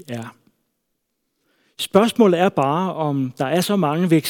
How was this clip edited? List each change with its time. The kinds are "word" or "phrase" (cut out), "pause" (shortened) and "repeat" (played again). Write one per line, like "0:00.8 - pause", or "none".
none